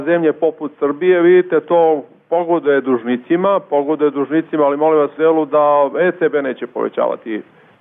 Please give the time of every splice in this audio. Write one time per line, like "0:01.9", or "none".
0:05.2